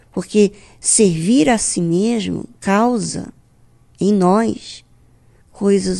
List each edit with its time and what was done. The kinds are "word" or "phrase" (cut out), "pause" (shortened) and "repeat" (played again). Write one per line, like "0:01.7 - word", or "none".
none